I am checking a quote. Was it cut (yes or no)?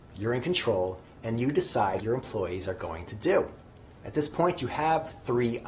yes